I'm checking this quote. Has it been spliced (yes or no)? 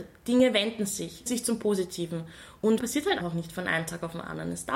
yes